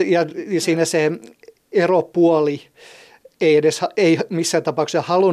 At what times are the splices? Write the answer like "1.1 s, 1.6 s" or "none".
none